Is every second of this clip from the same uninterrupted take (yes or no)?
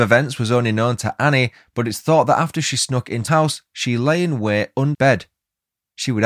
no